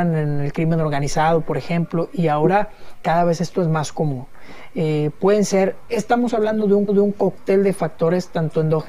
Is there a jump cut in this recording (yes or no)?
yes